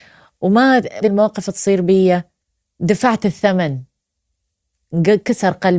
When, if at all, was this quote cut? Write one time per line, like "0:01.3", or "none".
0:01.0
0:02.4